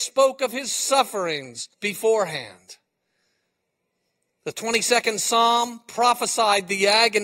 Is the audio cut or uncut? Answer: cut